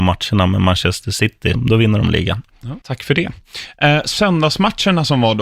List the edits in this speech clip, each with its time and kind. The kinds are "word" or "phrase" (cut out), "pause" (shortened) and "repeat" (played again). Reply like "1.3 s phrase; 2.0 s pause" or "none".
1.5 s word; 2.8 s pause